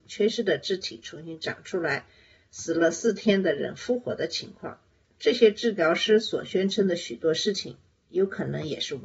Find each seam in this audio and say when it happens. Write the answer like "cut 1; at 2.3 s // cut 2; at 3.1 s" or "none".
none